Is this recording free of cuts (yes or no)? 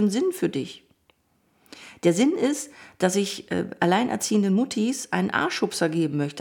yes